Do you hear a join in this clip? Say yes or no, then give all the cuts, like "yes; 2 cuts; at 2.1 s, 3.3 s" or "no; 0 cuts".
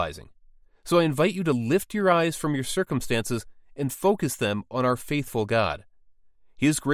no; 0 cuts